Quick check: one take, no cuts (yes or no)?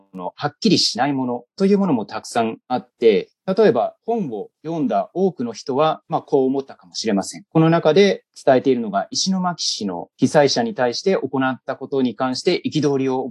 no